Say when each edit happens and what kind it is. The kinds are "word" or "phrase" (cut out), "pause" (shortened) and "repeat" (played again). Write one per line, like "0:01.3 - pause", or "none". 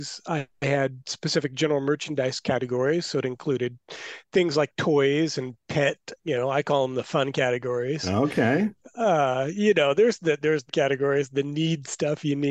0:06.2 - word
0:10.7 - word